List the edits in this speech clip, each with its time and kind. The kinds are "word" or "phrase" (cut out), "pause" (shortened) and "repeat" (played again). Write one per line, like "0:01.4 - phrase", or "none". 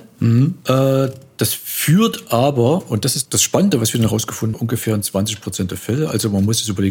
0:03.3 - word
0:04.5 - word